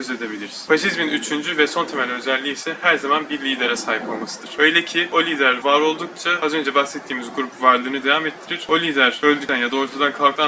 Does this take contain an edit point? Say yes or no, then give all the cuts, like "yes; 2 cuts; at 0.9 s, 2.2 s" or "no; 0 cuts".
no; 0 cuts